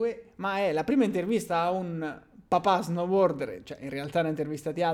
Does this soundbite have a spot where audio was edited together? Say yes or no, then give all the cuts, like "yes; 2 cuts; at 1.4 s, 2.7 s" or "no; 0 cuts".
yes; 1 cut; at 2.5 s